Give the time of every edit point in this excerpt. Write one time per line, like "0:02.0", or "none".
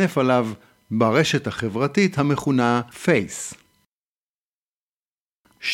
0:02.9

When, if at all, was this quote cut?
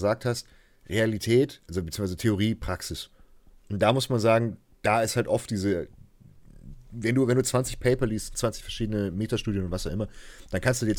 none

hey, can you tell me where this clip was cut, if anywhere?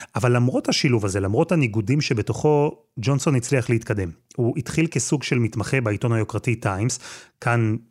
none

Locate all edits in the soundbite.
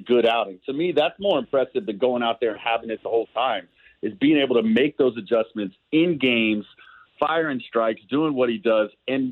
none

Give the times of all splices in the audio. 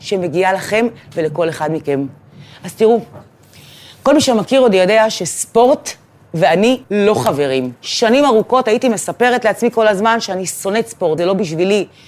0:06.8
0:07.8
0:11.2

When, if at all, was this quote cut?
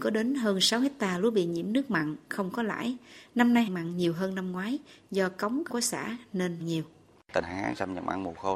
0:03.7
0:05.7
0:06.6
0:07.4

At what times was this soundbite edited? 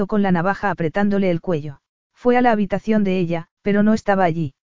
0:02.0
0:03.6

